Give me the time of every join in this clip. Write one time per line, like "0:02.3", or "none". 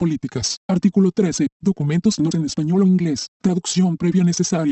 0:02.3